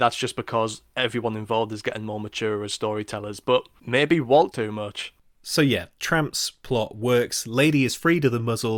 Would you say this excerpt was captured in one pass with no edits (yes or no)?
no